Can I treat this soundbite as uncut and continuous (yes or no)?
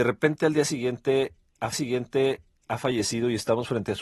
no